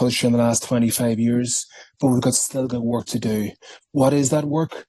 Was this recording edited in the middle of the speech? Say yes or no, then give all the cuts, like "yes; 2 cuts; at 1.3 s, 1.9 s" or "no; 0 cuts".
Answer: no; 0 cuts